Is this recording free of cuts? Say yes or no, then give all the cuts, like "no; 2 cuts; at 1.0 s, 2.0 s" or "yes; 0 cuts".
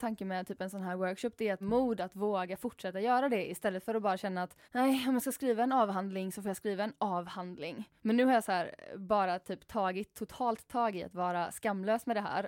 no; 2 cuts; at 1.6 s, 4.6 s